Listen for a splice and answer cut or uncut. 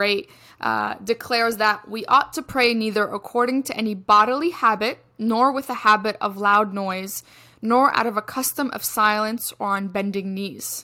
uncut